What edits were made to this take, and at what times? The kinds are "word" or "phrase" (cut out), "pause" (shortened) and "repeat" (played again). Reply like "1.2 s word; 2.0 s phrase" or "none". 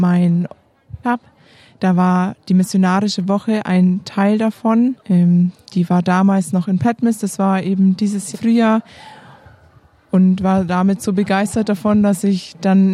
1.0 s phrase; 5.0 s pause; 8.3 s phrase